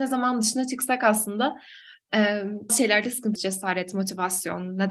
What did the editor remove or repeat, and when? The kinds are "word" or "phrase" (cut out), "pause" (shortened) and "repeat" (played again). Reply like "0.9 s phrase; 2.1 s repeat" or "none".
2.7 s word; 3.4 s word